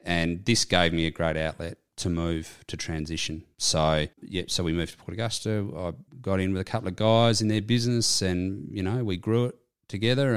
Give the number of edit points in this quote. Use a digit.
1